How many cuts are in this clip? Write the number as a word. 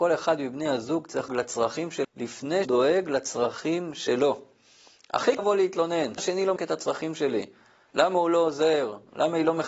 six